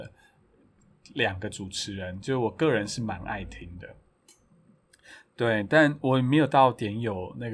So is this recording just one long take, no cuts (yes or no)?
yes